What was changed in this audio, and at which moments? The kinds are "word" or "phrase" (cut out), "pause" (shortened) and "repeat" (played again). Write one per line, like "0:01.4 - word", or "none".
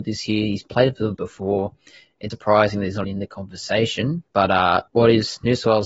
0:01.1 - word
0:02.3 - word
0:03.0 - word
0:04.3 - pause
0:04.9 - pause